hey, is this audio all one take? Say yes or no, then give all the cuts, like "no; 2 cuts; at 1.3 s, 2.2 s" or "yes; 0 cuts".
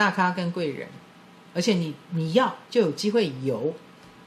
no; 1 cut; at 2.7 s